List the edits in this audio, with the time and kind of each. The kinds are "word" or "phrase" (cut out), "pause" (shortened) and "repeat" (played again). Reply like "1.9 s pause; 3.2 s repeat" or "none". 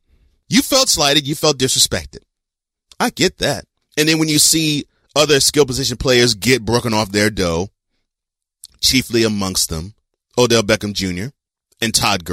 3.8 s pause